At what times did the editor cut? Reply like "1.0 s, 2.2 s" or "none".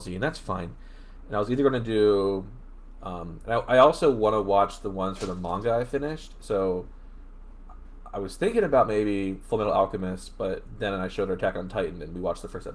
none